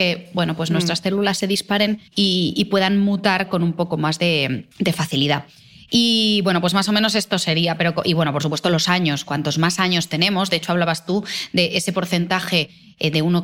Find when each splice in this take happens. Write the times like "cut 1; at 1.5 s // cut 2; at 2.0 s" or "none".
cut 1; at 2.1 s // cut 2; at 4.7 s